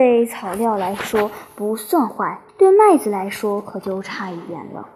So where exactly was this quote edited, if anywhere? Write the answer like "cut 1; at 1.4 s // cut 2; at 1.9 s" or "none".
cut 1; at 2.5 s

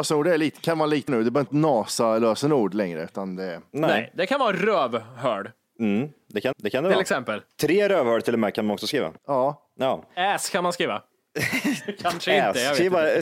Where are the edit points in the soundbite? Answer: cut 1; at 1.1 s // cut 2; at 1.5 s // cut 3; at 6.5 s // cut 4; at 9.2 s

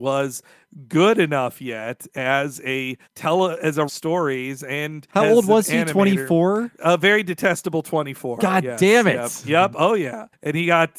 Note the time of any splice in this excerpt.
cut 1; at 3.0 s // cut 2; at 3.9 s

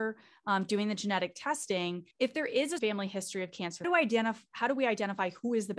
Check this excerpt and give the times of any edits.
cut 1; at 2.1 s // cut 2; at 2.8 s // cut 3; at 3.8 s

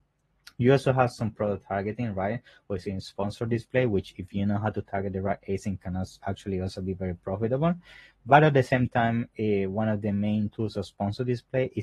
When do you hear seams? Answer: none

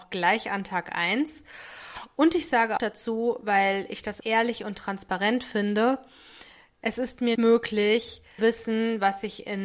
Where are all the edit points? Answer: cut 1; at 2.8 s // cut 2; at 4.2 s // cut 3; at 7.3 s // cut 4; at 8.4 s

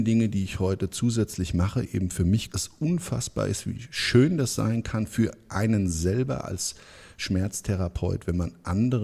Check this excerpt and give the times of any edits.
cut 1; at 2.5 s

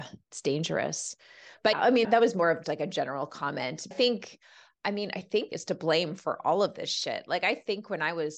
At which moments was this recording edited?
cut 1; at 1.7 s // cut 2; at 2.0 s // cut 3; at 2.6 s // cut 4; at 3.9 s // cut 5; at 5.5 s

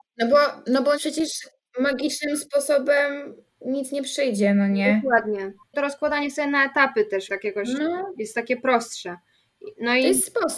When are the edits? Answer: cut 1; at 1.0 s // cut 2; at 7.3 s

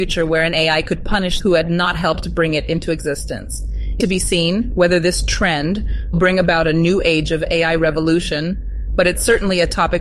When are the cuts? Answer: cut 1; at 1.4 s // cut 2; at 4.0 s // cut 3; at 6.1 s

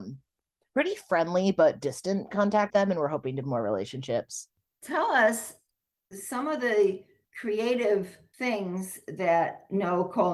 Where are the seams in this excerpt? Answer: cut 1; at 2.7 s // cut 2; at 3.4 s

